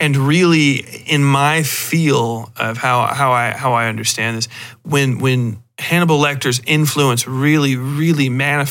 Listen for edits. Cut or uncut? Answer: uncut